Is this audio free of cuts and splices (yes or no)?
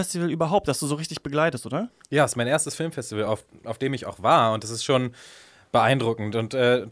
yes